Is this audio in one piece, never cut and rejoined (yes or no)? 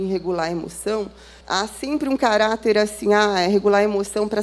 no